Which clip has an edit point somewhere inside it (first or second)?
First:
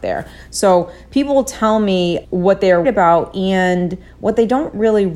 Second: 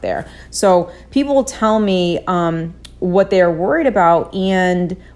first